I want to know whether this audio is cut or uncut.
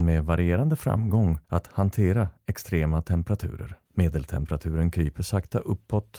cut